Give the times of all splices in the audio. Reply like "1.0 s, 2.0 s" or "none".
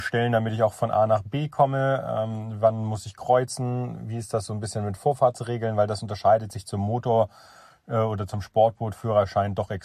none